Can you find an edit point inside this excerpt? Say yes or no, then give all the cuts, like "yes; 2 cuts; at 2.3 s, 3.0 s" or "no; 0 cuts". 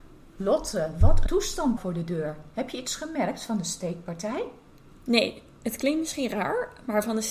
yes; 2 cuts; at 1.3 s, 1.8 s